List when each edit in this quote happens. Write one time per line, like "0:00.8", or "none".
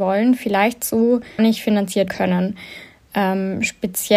0:01.4
0:02.1